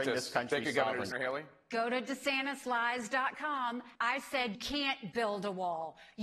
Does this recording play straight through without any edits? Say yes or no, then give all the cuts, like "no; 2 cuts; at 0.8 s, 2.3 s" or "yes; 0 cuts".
no; 4 cuts; at 1.1 s, 4.0 s, 4.5 s, 5.1 s